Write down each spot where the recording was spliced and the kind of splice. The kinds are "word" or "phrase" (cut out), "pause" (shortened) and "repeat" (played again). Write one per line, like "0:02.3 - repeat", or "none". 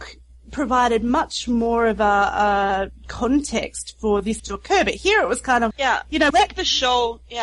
0:04.4 - word
0:05.7 - word
0:06.3 - word